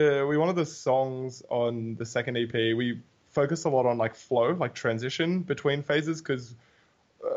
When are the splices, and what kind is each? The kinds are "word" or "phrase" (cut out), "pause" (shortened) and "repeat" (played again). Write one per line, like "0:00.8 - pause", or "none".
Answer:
none